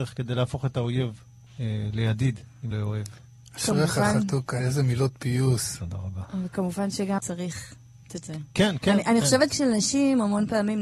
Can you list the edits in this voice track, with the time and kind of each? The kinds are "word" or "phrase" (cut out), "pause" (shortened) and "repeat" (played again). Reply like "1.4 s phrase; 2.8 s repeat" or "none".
1.5 s pause; 2.7 s word; 4.6 s word; 7.2 s word; 8.1 s word; 9.5 s word

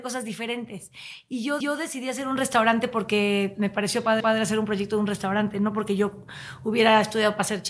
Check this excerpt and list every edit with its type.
1.6 s repeat; 4.2 s repeat

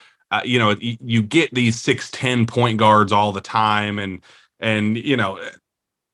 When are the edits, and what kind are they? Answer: none

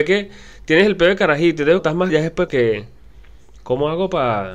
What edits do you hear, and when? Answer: 1.8 s word; 2.1 s word; 2.5 s word

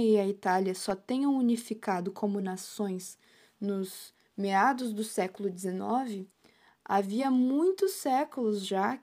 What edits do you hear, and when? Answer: none

